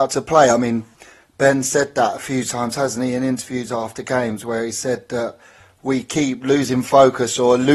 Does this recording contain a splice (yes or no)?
no